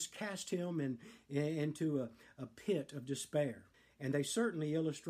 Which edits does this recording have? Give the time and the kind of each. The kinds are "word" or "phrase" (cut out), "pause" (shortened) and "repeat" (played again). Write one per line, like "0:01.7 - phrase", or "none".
0:03.7 - pause